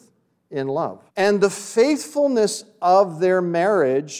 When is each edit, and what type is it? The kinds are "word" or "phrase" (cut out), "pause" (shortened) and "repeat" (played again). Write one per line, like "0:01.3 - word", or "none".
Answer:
0:01.1 - pause